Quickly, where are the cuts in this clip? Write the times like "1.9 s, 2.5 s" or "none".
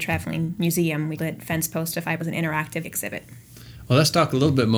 1.2 s, 2.2 s, 2.8 s

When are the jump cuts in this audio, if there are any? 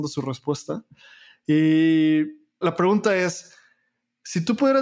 2.6 s

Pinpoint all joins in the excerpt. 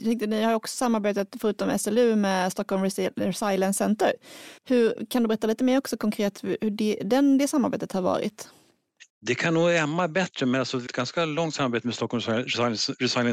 4.6 s, 9.1 s, 10.9 s

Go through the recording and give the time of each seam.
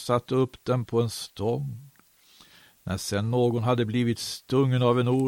none

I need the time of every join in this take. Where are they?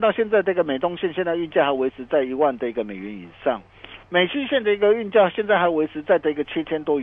4.0 s

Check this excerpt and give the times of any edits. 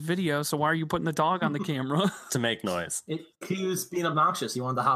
2.3 s

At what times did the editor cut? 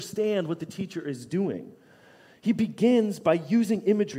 none

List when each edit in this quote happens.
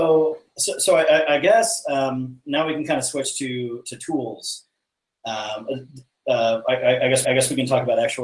7.2 s

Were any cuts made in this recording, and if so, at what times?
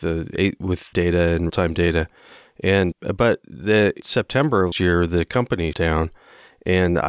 0.9 s, 1.5 s, 2.9 s, 4.0 s, 4.7 s, 5.7 s

